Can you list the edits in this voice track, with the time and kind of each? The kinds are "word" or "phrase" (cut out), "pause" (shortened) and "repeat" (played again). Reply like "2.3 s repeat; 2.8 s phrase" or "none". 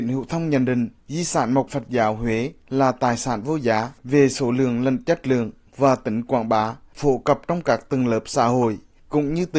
1.0 s pause; 1.7 s word; 4.0 s pause